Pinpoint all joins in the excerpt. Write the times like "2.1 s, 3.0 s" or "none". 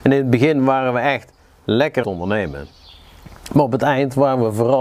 2.0 s

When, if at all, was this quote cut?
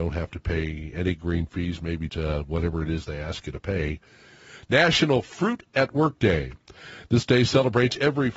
2.1 s

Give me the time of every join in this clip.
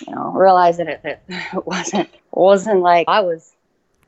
1.0 s, 2.2 s, 3.1 s

